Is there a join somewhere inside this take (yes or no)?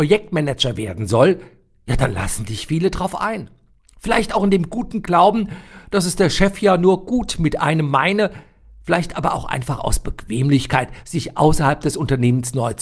no